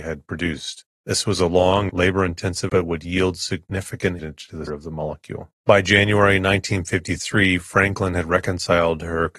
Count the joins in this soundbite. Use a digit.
6